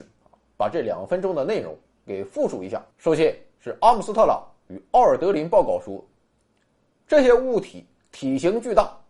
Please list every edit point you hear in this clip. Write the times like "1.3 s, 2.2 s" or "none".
2.9 s